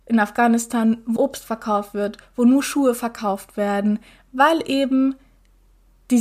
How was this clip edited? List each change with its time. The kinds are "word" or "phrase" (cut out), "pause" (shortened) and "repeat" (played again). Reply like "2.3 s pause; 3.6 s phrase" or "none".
1.2 s word